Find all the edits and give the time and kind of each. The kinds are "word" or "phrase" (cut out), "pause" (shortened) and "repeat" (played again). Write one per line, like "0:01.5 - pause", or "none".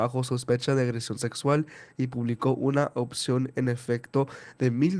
none